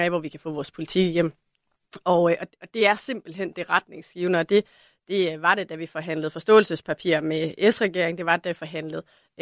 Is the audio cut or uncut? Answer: uncut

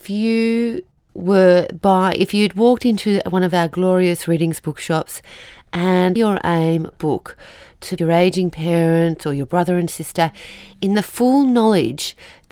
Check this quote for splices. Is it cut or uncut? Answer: cut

